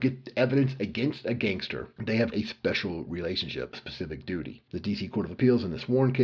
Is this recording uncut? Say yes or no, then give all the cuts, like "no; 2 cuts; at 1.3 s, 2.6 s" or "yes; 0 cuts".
no; 2 cuts; at 2.3 s, 3.7 s